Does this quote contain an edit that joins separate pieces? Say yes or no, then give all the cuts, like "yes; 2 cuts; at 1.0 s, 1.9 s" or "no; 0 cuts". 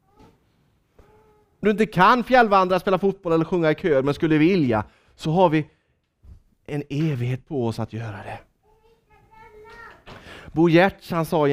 yes; 2 cuts; at 1.6 s, 6.5 s